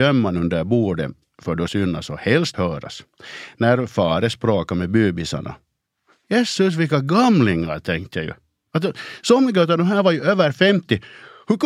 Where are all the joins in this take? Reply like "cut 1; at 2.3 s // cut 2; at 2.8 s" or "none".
cut 1; at 1.7 s // cut 2; at 2.5 s

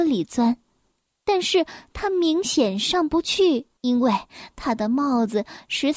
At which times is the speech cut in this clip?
cut 1; at 3.8 s

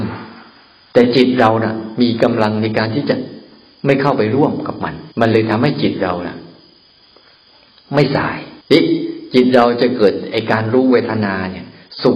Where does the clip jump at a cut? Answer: cut 1; at 5.1 s // cut 2; at 8.6 s

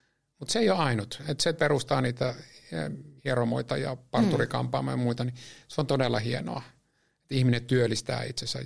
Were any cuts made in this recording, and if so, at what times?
cut 1; at 1.6 s // cut 2; at 3.2 s

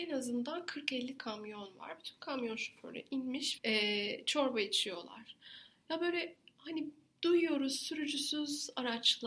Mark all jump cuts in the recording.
cut 1; at 1.2 s // cut 2; at 3.6 s

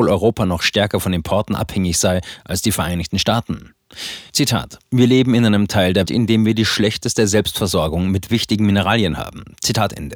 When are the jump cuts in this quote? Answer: cut 1; at 6.1 s

